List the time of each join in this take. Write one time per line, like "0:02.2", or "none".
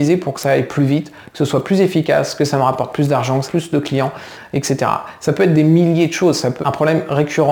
0:03.5
0:06.6